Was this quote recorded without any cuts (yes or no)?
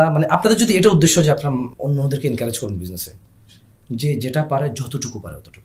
no